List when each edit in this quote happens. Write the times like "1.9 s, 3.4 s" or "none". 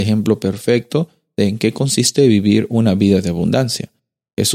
none

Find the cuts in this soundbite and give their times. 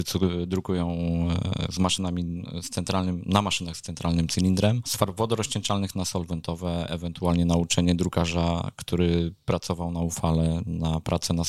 none

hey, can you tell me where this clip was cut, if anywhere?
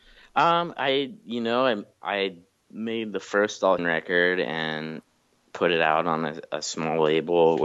3.8 s

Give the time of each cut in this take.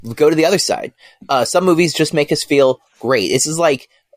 none

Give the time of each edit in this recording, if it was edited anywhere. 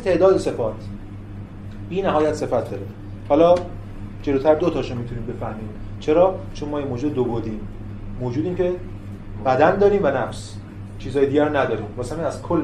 4.6 s

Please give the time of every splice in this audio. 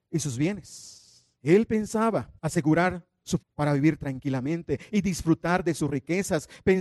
1.3 s, 2.4 s, 3.4 s

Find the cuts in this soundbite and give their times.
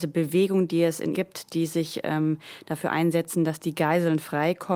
1.1 s

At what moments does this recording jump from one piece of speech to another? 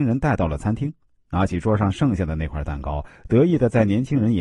none

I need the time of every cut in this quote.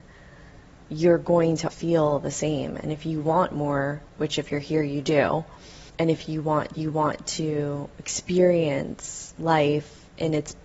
1.7 s, 4.1 s, 5.9 s, 6.7 s

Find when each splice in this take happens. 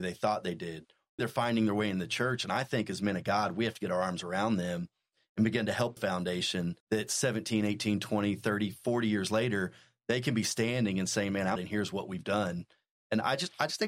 1.2 s, 6.0 s, 6.8 s, 11.6 s

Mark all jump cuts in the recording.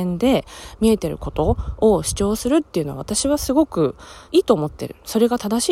4.3 s

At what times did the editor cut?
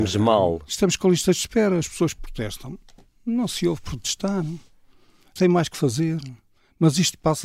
5.4 s

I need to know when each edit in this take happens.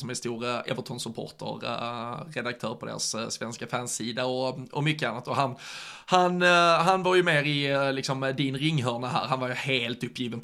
none

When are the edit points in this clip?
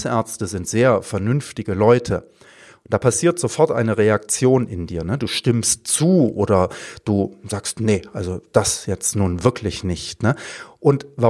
none

